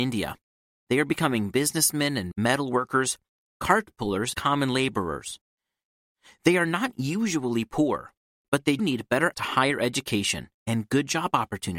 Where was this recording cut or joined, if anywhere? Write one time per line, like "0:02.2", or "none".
0:02.3
0:04.3
0:08.8
0:09.3

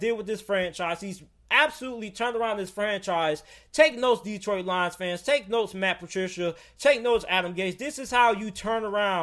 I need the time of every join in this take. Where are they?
none

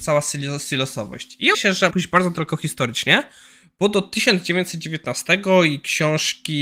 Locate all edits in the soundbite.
0:01.5
0:01.9

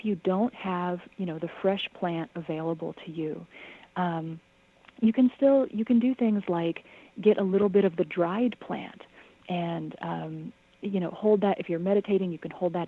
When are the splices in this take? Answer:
none

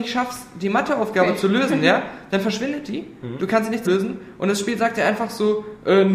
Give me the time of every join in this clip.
0:03.9

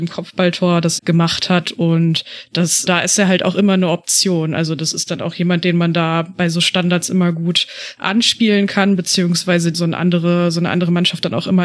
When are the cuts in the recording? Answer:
0:01.0
0:02.9
0:09.7

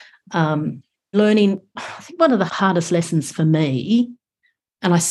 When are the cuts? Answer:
0:01.1
0:01.8
0:02.5

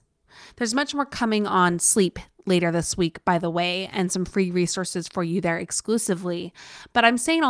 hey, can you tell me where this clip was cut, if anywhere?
none

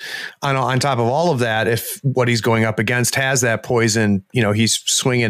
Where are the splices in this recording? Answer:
none

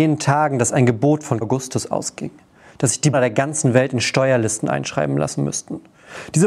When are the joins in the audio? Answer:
0:01.4
0:03.1

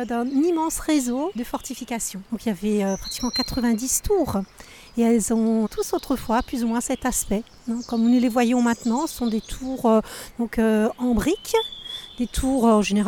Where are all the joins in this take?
0:01.4
0:05.7

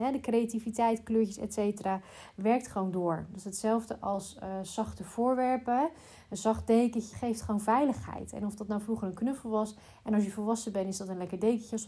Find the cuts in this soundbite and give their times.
0:07.1

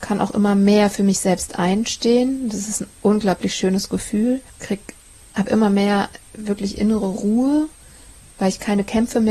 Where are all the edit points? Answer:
0:04.5

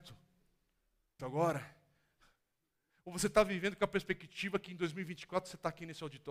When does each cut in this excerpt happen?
0:01.2

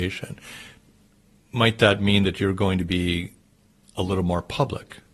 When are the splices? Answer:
none

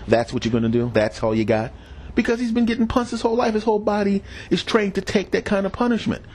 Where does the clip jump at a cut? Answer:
none

